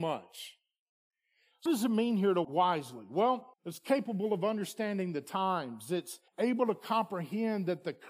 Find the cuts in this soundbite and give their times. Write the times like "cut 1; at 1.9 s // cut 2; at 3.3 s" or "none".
cut 1; at 1.7 s // cut 2; at 2.4 s // cut 3; at 3.5 s // cut 4; at 6.3 s